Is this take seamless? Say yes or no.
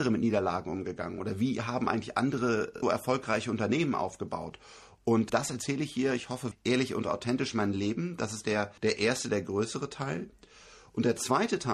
no